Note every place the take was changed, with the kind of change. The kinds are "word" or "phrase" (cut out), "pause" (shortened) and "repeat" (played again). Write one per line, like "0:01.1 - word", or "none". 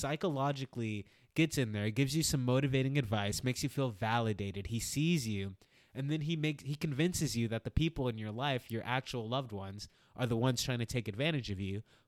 none